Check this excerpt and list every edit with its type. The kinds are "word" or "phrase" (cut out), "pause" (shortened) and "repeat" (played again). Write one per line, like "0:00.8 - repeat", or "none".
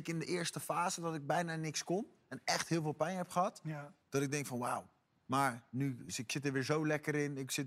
none